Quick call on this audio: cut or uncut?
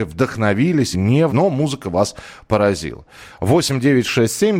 cut